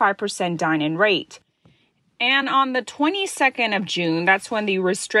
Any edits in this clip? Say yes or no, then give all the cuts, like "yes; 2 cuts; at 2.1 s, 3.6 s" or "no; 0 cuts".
no; 0 cuts